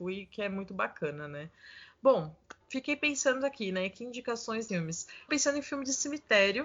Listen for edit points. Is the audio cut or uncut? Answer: cut